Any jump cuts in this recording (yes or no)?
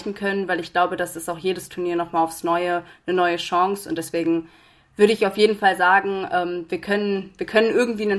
no